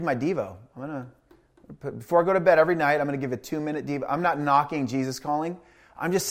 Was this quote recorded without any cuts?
yes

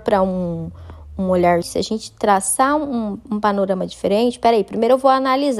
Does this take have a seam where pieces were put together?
yes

